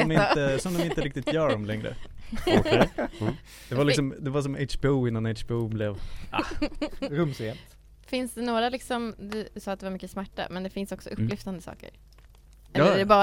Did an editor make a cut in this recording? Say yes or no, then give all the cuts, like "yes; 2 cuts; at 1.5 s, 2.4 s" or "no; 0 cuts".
no; 0 cuts